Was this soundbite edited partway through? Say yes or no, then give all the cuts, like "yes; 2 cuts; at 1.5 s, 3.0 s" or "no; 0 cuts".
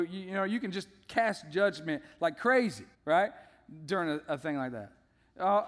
yes; 1 cut; at 2.9 s